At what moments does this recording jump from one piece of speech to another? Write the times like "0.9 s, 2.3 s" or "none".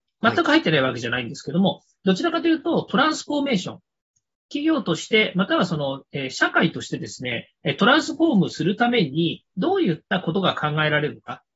none

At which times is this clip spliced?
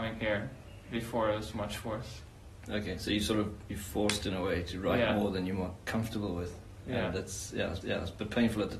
7.8 s

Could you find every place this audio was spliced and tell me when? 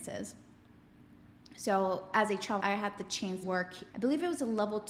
2.6 s, 3.4 s, 3.9 s

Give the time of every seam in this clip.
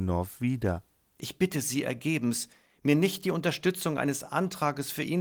none

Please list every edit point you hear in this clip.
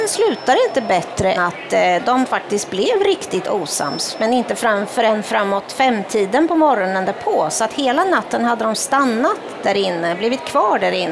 1.4 s

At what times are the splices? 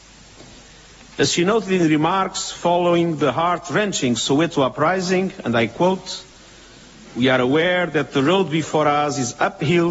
none

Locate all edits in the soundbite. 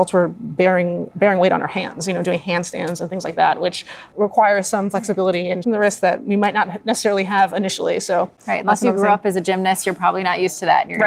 1.1 s, 5.6 s

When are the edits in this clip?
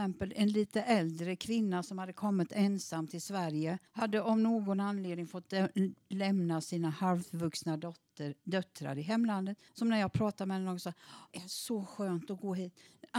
3.9 s, 9.7 s, 11.3 s

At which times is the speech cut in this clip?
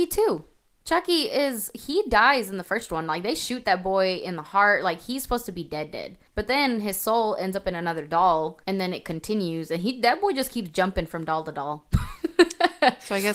6.3 s, 8.6 s

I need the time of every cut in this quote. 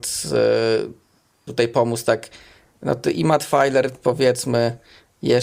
1.5 s

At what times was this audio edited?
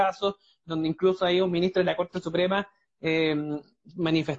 none

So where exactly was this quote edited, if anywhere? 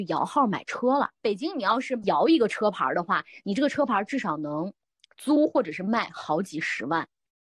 none

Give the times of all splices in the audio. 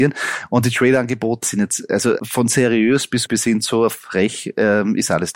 1.4 s, 2.2 s, 3.3 s

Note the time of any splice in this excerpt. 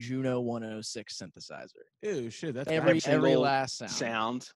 3.0 s

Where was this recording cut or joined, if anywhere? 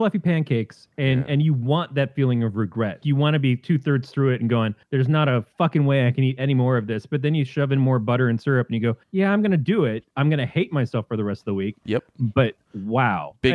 3.0 s, 4.8 s, 9.0 s

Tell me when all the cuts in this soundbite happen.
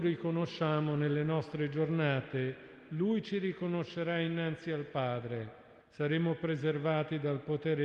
5.8 s

